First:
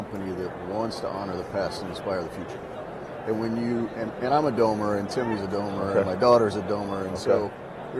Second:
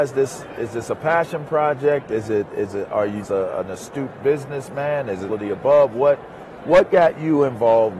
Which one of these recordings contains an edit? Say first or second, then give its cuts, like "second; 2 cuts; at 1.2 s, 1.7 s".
second; 2 cuts; at 3.2 s, 5.3 s